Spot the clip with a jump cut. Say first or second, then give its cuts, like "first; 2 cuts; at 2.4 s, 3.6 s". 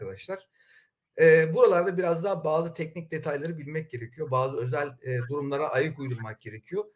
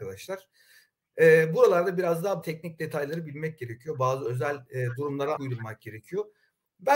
second; 2 cuts; at 2.4 s, 5.4 s